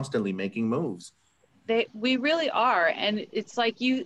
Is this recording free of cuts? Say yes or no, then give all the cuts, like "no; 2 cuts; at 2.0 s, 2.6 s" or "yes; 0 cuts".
yes; 0 cuts